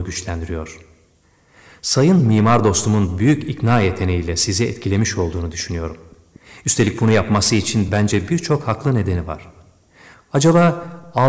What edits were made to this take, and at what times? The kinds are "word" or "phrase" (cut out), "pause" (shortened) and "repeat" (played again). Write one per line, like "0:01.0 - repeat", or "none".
none